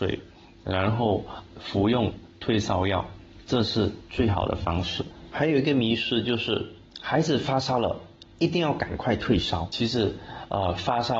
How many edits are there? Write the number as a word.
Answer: zero